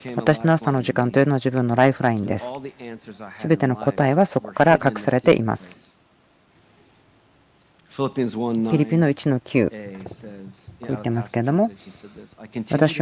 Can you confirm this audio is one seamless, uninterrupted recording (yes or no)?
yes